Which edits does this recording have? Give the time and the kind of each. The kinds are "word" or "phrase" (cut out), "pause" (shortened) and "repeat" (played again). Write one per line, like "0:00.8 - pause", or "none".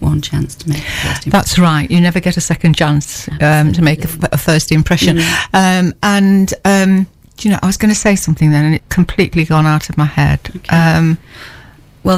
0:07.2 - pause
0:08.8 - word